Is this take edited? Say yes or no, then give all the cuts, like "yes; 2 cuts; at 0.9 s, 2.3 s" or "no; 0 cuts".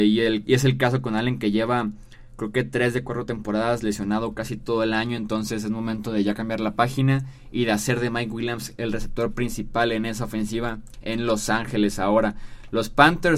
no; 0 cuts